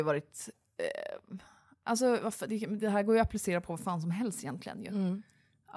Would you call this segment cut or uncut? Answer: uncut